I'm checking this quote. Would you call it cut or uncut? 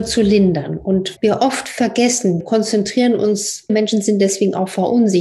cut